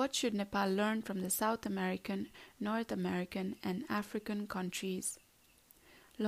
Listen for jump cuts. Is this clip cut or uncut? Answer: uncut